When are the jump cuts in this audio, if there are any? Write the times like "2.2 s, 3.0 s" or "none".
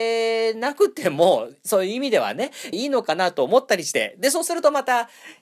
2.7 s